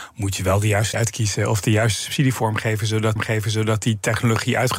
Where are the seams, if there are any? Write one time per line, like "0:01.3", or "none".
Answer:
0:00.9
0:03.2